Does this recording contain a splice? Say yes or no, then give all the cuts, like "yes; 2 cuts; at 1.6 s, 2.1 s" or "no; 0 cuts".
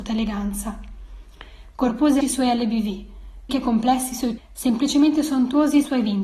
yes; 3 cuts; at 2.2 s, 3.5 s, 4.4 s